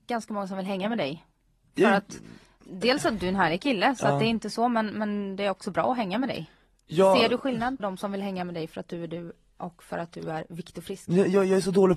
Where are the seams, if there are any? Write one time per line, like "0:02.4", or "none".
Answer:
0:07.8